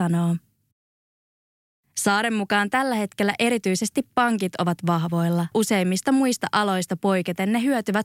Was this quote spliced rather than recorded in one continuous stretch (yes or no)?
yes